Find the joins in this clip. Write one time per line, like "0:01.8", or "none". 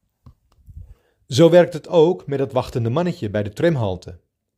none